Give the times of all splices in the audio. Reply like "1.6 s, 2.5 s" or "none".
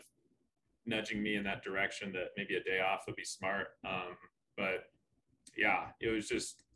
none